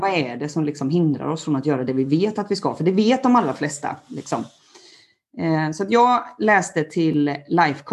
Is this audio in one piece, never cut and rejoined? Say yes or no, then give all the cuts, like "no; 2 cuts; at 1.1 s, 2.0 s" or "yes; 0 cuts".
yes; 0 cuts